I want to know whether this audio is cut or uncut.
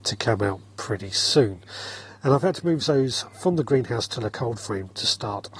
uncut